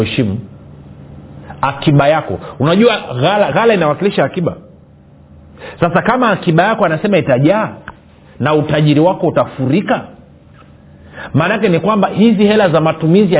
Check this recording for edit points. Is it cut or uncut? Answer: cut